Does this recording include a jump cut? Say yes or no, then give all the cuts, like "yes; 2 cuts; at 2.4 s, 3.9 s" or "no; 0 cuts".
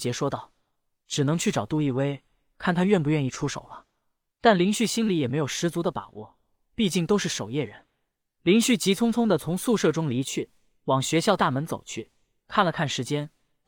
no; 0 cuts